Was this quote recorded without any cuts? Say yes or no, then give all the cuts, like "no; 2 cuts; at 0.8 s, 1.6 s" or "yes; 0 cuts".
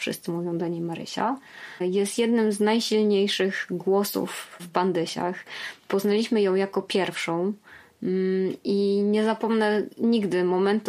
yes; 0 cuts